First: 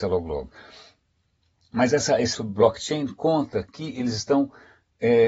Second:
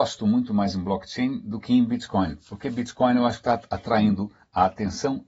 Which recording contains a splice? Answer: first; 1 cut; at 2.3 s

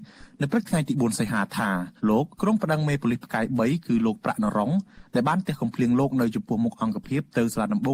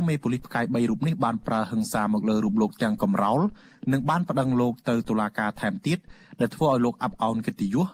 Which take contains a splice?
first; 2 cuts; at 2.0 s, 2.3 s

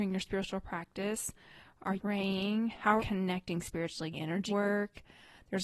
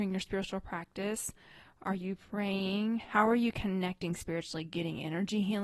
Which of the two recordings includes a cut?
first; 4 cuts; at 2.0 s, 3.0 s, 4.1 s, 4.5 s

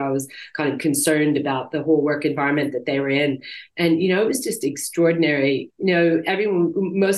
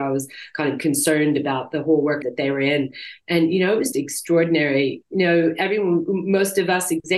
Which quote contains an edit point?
second; 2 cuts; at 2.2 s, 3.9 s

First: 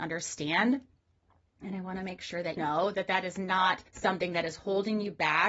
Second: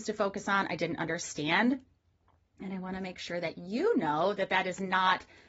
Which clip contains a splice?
first; 2 cuts; at 2.6 s, 3.9 s

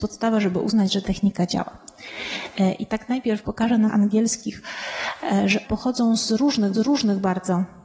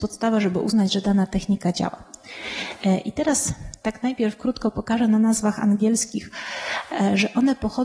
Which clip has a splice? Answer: first; 6 cuts; at 1.0 s, 2.9 s, 3.4 s, 3.9 s, 5.6 s, 6.7 s

